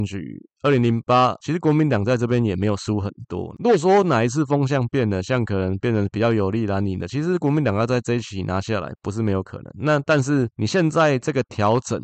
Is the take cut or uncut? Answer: cut